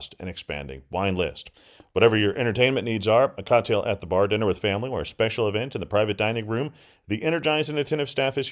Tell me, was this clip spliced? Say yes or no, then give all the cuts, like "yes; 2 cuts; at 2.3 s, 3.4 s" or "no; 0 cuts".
no; 0 cuts